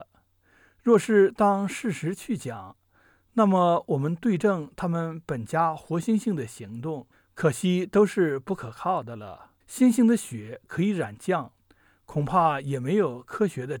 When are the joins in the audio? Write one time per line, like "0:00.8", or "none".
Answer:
0:07.1
0:09.6

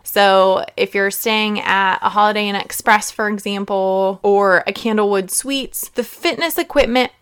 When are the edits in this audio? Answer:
none

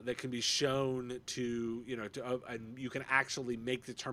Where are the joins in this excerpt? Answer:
none

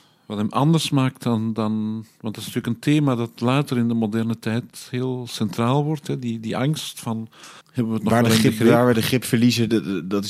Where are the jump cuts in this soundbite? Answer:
0:07.6

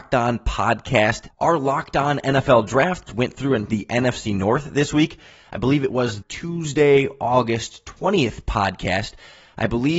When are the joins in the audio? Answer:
0:01.3
0:03.1
0:03.7
0:06.2

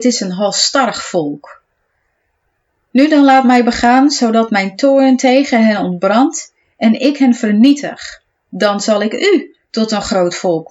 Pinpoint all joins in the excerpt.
none

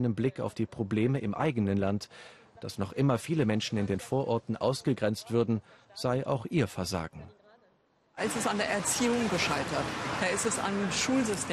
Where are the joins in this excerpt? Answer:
none

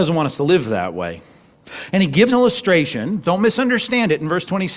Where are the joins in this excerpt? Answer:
0:02.3

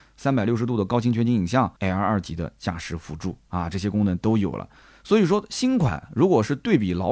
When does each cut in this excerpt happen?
0:01.8

